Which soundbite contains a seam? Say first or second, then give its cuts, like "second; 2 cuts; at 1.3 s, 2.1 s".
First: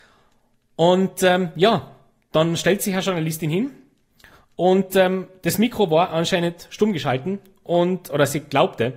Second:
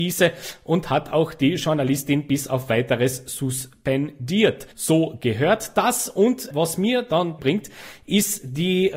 second; 3 cuts; at 4.7 s, 6.5 s, 7.4 s